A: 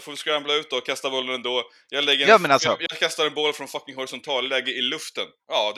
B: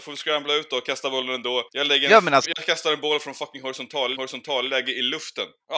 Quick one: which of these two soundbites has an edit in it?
B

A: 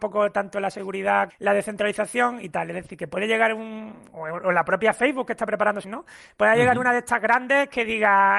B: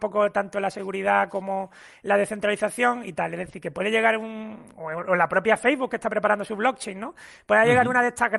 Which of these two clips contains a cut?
A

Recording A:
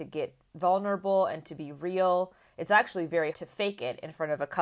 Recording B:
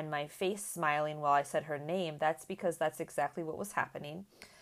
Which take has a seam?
A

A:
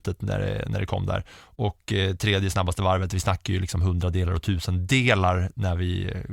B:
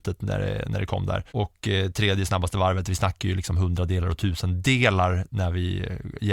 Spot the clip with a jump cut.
B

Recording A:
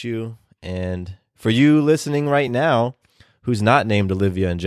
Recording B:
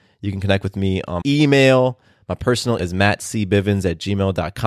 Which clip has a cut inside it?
B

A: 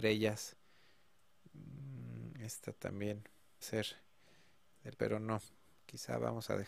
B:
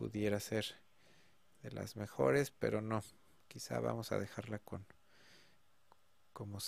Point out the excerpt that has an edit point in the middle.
A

